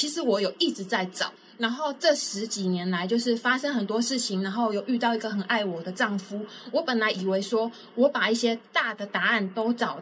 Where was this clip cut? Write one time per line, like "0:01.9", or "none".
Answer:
none